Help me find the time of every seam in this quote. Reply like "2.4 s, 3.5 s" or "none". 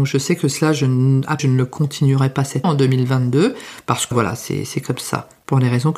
1.4 s, 2.6 s, 4.1 s